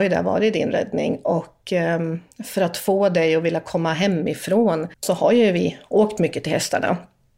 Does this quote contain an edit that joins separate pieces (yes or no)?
yes